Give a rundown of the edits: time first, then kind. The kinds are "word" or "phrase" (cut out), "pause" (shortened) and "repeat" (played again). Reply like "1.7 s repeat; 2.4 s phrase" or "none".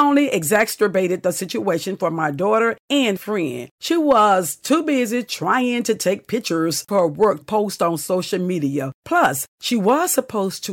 3.2 s word; 6.9 s word; 7.4 s word

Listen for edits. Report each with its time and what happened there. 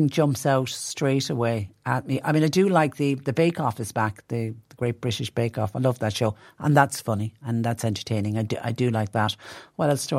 none

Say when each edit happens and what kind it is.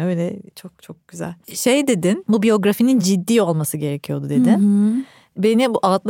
none

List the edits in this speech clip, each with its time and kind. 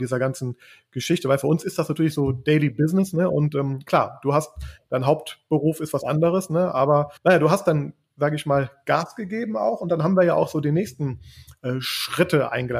7.2 s pause

